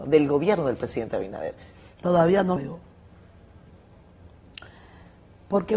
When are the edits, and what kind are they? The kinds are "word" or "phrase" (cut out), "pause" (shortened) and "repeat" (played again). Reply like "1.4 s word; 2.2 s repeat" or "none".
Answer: 2.6 s word